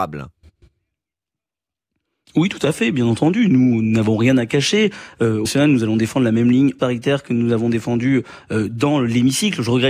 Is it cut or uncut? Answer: cut